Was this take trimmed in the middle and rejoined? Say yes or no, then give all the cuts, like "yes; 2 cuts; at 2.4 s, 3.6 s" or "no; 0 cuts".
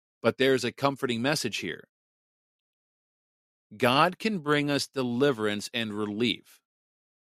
no; 0 cuts